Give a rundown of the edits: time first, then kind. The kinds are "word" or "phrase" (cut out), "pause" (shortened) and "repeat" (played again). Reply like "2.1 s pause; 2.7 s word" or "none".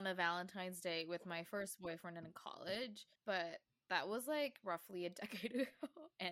3.2 s pause